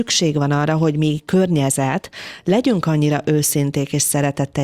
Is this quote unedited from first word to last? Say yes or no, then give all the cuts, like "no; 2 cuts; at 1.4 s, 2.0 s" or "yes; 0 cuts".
yes; 0 cuts